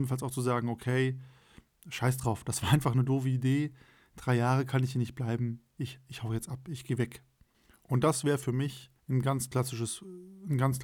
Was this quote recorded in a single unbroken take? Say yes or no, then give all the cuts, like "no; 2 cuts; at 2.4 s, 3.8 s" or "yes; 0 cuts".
no; 1 cut; at 9.0 s